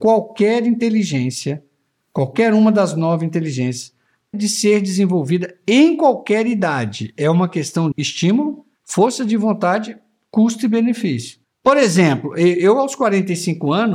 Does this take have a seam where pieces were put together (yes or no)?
yes